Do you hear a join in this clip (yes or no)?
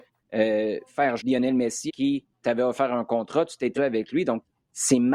yes